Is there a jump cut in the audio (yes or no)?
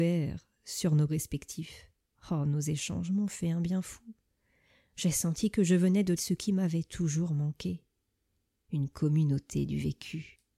yes